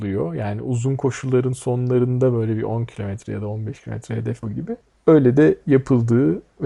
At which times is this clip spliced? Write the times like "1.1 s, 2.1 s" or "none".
4.4 s

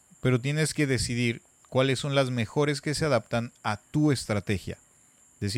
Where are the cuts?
none

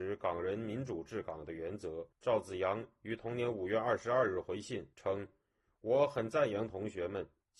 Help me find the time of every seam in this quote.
2.1 s, 4.9 s

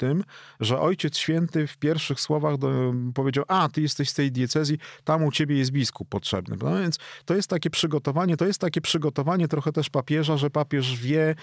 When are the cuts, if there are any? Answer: 8.4 s

